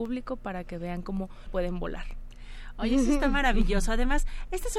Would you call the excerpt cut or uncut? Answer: cut